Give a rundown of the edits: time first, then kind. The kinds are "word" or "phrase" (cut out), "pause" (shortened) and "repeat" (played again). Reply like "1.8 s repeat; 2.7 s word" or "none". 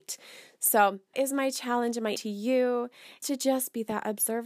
1.1 s word; 2.2 s word; 3.2 s word